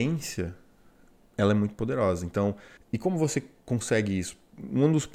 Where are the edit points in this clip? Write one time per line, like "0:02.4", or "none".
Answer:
0:02.8